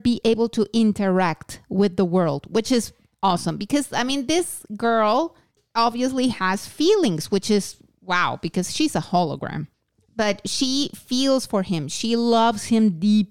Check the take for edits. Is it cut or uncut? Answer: uncut